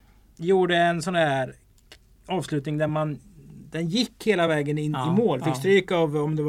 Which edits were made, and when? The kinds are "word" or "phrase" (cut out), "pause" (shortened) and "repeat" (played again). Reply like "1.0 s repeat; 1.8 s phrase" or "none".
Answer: none